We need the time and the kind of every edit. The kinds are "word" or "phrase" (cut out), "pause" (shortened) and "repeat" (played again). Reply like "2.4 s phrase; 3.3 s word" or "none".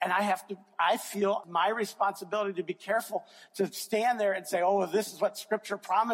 1.4 s word